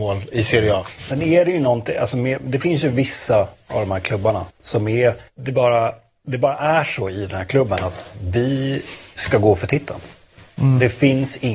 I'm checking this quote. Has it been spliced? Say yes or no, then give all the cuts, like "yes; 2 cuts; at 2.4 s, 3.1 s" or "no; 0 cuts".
yes; 2 cuts; at 4.5 s, 5.3 s